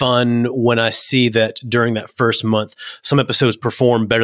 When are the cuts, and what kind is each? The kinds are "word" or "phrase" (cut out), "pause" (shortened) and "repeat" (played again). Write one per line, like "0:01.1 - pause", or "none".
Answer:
none